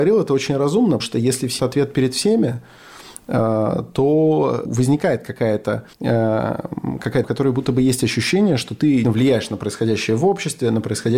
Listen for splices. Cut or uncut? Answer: cut